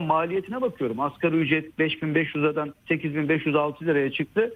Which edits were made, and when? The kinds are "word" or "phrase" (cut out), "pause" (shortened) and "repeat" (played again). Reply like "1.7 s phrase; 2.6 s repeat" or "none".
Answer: 2.8 s pause